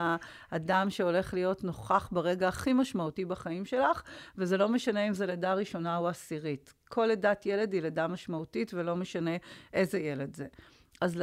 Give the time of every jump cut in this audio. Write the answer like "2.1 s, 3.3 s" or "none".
6.8 s